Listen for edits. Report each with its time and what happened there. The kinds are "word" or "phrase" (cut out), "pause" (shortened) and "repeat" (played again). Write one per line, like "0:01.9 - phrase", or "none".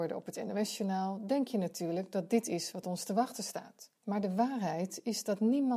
0:04.0 - pause